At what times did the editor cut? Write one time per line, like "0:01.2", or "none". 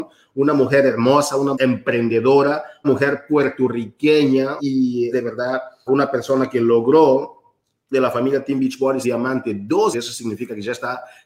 0:01.5
0:02.8
0:04.6
0:05.1
0:05.9
0:07.9
0:09.0
0:09.9